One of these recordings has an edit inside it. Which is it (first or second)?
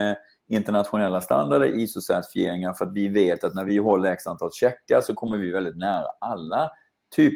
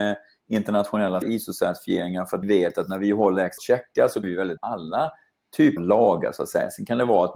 second